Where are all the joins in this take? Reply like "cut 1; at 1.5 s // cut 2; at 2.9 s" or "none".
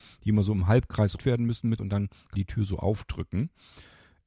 cut 1; at 1.2 s // cut 2; at 1.8 s // cut 3; at 2.3 s